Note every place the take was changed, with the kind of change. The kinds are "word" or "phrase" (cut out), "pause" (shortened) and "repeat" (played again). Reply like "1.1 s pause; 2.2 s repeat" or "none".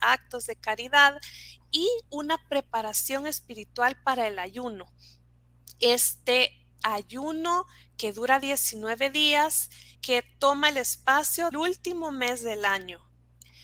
2.1 s pause; 6.7 s pause; 9.9 s word; 11.5 s word